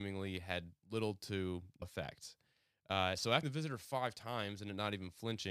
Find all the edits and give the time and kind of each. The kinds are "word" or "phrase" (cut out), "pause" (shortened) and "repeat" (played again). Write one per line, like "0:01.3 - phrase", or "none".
0:01.8 - word
0:03.4 - word

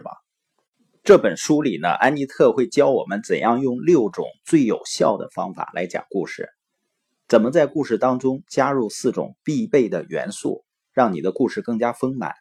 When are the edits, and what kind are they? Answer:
none

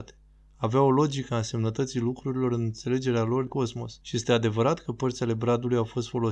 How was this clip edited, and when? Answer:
0:03.5 - word
0:04.0 - word

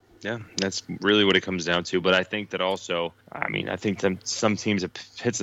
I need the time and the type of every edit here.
0:03.2 - pause

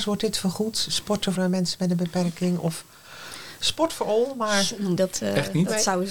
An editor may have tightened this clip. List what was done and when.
0:01.4 - word
0:05.0 - word

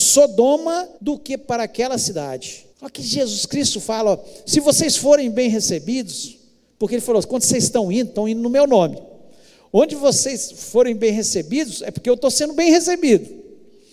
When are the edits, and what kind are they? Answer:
0:00.9 - pause
0:02.7 - pause

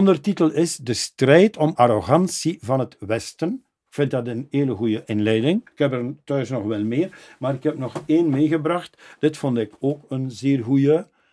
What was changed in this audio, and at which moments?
0:01.7 - phrase
0:05.7 - pause

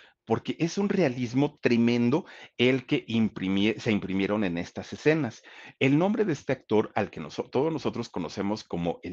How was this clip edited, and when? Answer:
none

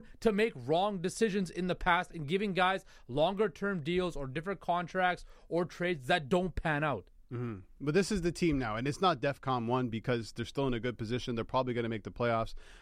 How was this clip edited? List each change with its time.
none

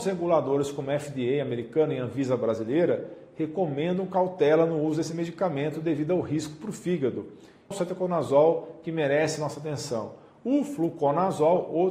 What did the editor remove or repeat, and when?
0:07.7 - phrase

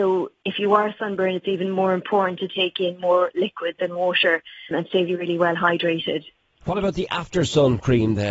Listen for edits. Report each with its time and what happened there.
0:04.7 - word
0:05.1 - word

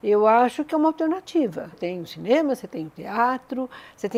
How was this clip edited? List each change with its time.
0:01.7 - phrase

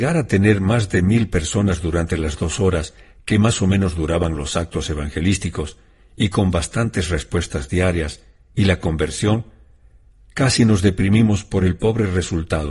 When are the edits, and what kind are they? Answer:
none

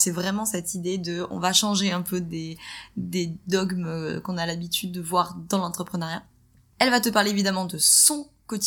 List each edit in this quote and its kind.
none

